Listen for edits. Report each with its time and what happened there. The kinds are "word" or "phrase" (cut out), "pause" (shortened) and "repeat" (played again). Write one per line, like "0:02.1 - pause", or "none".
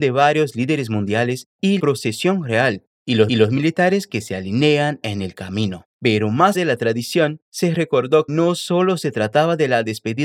0:01.8 - word
0:03.3 - repeat
0:05.9 - pause
0:06.5 - word
0:08.3 - word

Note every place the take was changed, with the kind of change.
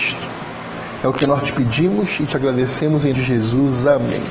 0:03.1 - word

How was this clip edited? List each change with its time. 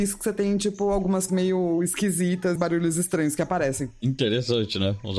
0:01.3 - word
0:02.6 - phrase

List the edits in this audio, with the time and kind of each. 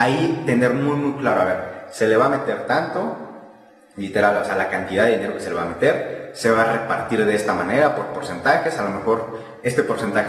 none

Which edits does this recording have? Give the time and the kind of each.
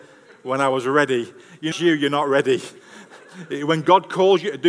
0:01.7 - phrase

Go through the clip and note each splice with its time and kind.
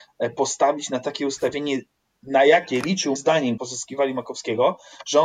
0:03.2 - word
0:03.6 - word

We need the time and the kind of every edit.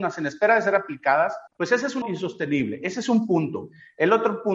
0:01.5 - pause
0:02.0 - word

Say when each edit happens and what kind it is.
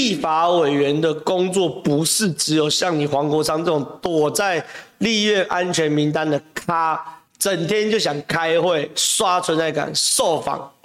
0:07.3 - pause

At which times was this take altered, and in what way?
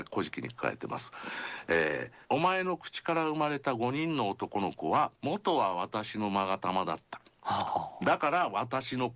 0:02.2 - pause
0:05.2 - pause

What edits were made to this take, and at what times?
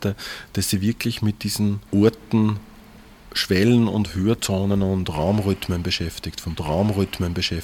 0:01.9 - pause
0:06.6 - repeat

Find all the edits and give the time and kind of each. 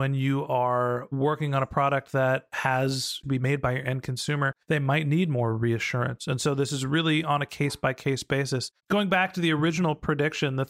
0:03.2 - phrase
0:04.6 - pause
0:08.8 - pause

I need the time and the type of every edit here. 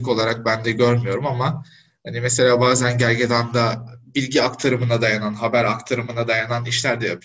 none

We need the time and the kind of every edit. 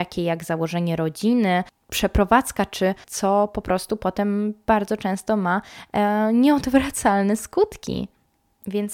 0:03.0 - word

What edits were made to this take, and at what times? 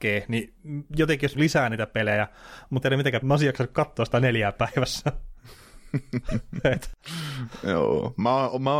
0:01.3 - phrase
0:02.8 - phrase
0:03.2 - word
0:04.5 - word

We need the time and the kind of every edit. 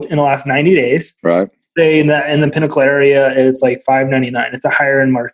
0:01.2 - pause

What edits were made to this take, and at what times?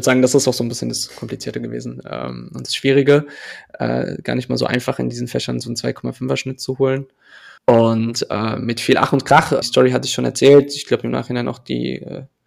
0:07.6 - pause
0:09.6 - word

